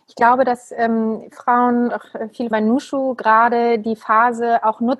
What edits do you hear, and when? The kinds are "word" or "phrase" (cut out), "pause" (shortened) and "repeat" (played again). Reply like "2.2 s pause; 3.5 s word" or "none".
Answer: 1.3 s word; 1.9 s word; 2.5 s word